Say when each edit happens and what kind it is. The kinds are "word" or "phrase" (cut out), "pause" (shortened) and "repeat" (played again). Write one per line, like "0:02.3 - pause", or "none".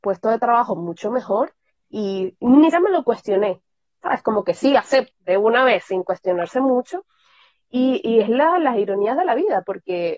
0:01.8 - word
0:02.7 - word
0:05.1 - phrase